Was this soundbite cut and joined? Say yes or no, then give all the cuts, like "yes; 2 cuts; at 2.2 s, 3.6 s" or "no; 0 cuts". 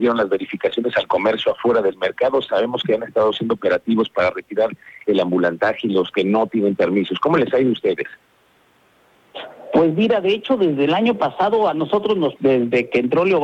yes; 1 cut; at 12.4 s